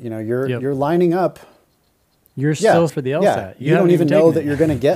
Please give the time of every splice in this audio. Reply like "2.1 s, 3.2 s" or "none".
2.9 s